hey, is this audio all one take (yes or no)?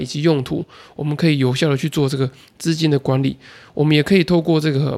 yes